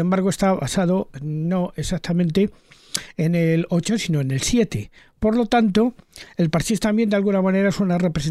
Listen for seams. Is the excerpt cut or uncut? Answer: uncut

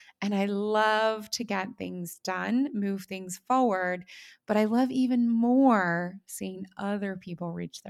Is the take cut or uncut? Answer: uncut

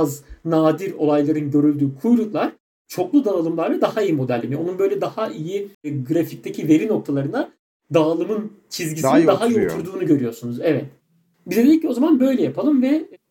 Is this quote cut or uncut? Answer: cut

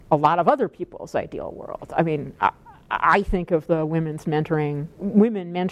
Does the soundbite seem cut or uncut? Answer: uncut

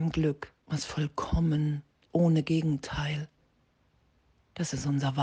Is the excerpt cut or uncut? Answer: cut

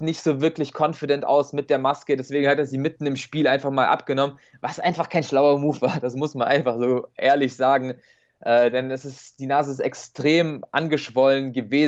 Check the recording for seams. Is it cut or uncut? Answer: uncut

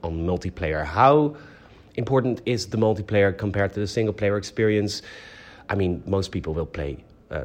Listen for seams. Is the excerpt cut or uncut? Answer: uncut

